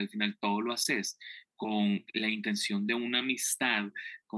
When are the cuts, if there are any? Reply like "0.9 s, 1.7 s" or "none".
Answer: none